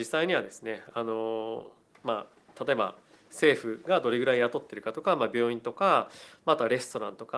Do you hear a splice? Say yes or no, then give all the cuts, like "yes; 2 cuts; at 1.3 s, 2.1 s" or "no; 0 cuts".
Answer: no; 0 cuts